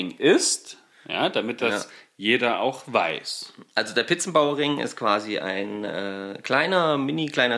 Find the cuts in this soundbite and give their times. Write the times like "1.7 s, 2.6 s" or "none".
none

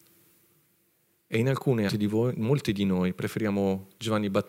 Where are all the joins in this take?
1.9 s

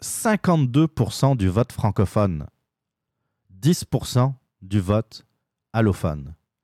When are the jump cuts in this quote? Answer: none

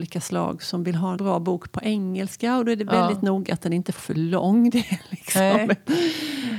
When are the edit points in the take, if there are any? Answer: 1.2 s, 4.0 s

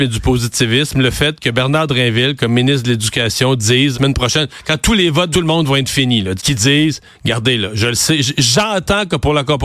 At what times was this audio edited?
3.9 s, 5.3 s, 6.4 s

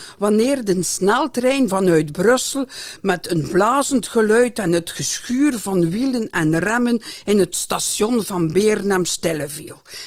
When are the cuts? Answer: none

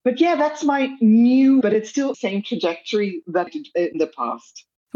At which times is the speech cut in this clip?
1.6 s, 2.1 s, 3.5 s

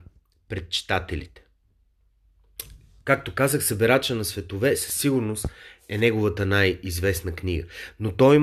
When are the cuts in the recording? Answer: none

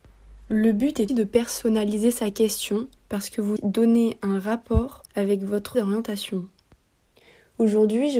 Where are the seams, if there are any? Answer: 1.1 s, 3.0 s, 3.6 s, 5.1 s, 5.7 s

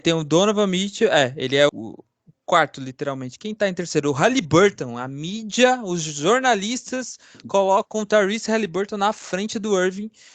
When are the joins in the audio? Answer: 1.7 s

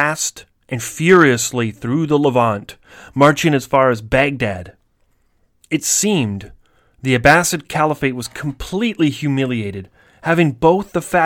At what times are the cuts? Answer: none

